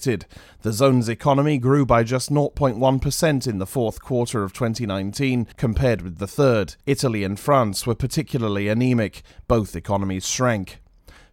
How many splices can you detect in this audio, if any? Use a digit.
2